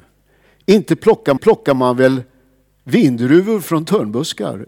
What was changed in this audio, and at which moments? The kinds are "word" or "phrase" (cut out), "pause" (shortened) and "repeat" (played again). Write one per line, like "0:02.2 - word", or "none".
0:01.4 - repeat

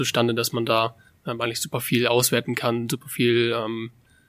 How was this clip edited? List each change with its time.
0:01.1 - pause

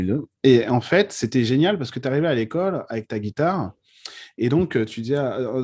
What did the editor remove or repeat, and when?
none

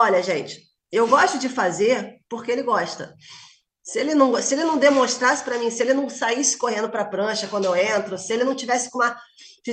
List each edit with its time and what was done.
none

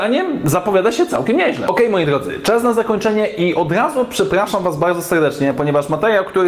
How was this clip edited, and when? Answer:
none

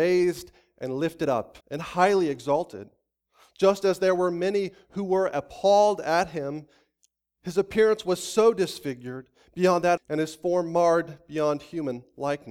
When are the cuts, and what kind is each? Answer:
0:01.6 - pause
0:10.0 - phrase

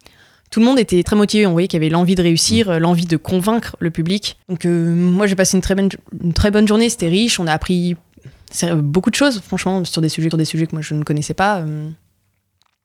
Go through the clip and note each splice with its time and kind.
0:01.0 - word
0:04.4 - pause
0:10.3 - repeat

